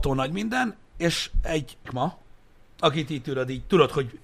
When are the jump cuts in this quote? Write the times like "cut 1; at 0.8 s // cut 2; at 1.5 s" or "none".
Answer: cut 1; at 1.8 s